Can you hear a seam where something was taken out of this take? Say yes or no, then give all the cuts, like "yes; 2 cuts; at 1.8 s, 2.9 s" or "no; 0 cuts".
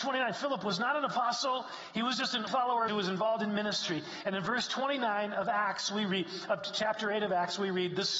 yes; 2 cuts; at 2.5 s, 2.9 s